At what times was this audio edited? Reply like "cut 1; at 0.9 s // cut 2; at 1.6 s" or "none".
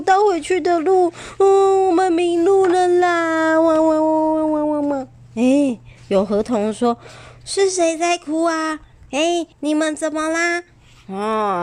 cut 1; at 9.5 s

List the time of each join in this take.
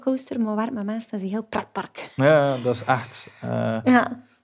none

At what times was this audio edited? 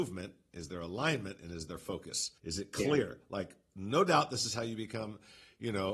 cut 1; at 2.4 s

